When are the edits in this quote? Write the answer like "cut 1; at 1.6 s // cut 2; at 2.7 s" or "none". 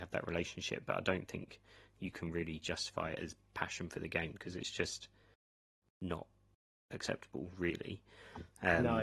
none